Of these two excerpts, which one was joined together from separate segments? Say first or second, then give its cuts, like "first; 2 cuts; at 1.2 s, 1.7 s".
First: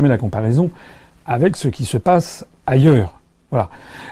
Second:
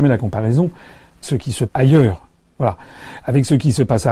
second; 2 cuts; at 1.2 s, 1.7 s